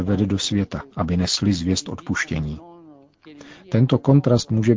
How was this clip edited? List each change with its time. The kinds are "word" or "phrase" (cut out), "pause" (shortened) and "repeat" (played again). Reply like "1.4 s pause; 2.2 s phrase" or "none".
0.9 s pause